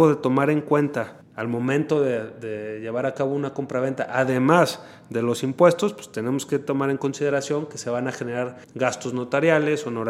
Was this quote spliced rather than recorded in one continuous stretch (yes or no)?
yes